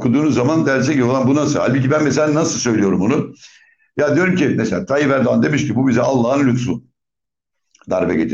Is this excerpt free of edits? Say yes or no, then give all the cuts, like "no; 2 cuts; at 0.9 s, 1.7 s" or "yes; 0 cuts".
yes; 0 cuts